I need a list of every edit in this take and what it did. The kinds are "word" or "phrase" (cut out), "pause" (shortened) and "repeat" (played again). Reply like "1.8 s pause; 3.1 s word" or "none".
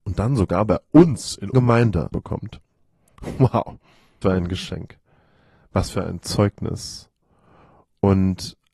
1.5 s word; 2.1 s word; 4.2 s word

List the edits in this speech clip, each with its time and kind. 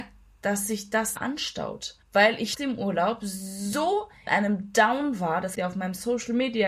1.2 s word; 2.0 s pause; 2.5 s word; 4.3 s word; 5.5 s word

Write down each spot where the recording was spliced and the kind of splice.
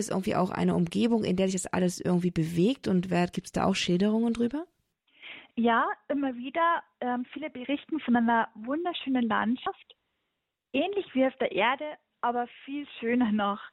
none

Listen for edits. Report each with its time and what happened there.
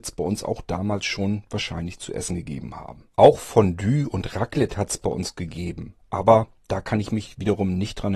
3.1 s pause

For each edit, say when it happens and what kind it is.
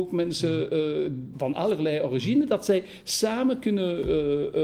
1.3 s word

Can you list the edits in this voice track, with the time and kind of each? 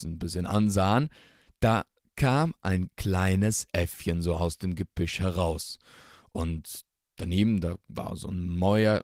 none

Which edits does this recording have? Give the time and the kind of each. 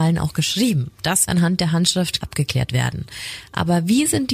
1.3 s word; 2.2 s word

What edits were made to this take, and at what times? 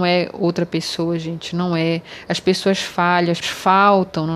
3.4 s word

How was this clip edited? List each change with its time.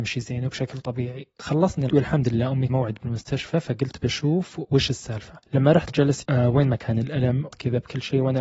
1.9 s word; 2.7 s phrase; 5.4 s pause; 5.9 s word; 6.2 s word; 7.5 s word

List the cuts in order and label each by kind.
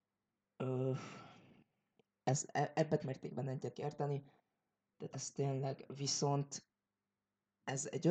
3.0 s word; 3.7 s word; 5.1 s word

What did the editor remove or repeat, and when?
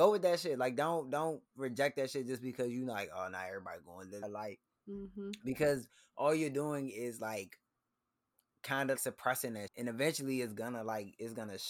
4.2 s word; 9.0 s word; 9.7 s word

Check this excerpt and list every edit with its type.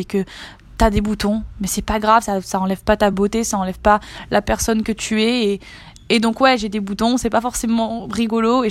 none

